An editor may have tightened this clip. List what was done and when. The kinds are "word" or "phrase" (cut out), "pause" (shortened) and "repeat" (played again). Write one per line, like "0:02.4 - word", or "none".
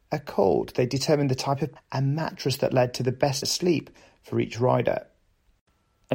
0:01.8 - word
0:03.4 - word